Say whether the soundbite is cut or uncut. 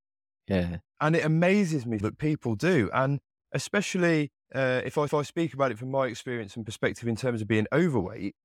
cut